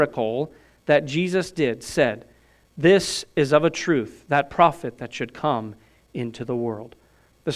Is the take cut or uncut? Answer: uncut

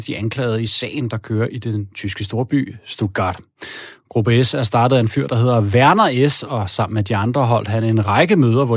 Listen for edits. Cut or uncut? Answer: uncut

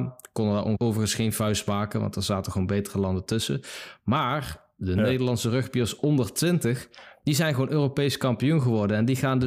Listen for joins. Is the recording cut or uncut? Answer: uncut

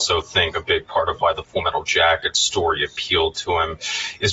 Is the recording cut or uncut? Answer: uncut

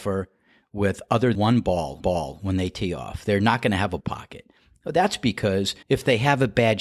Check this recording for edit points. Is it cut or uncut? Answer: cut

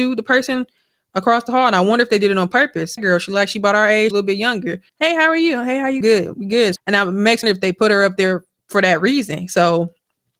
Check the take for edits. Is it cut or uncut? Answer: cut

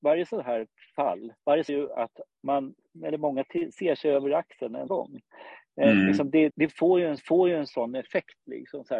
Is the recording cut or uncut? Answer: cut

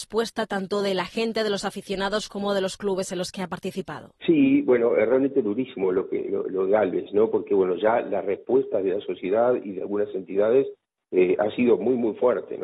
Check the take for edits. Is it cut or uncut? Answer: cut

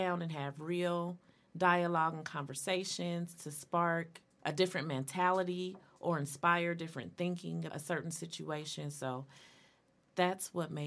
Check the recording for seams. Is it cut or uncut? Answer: cut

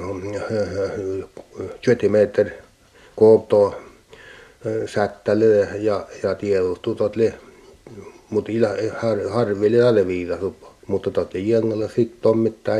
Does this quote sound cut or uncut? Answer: cut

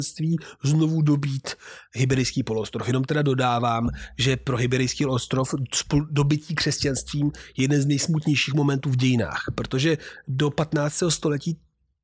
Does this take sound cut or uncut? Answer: uncut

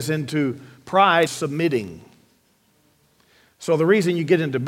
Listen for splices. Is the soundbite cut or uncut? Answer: cut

